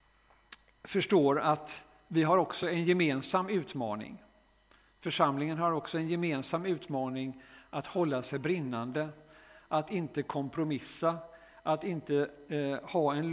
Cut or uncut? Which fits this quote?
uncut